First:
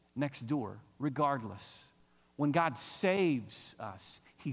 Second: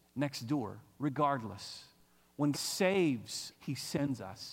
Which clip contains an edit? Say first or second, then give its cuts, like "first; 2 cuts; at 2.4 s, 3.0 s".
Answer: second; 2 cuts; at 2.5 s, 3.5 s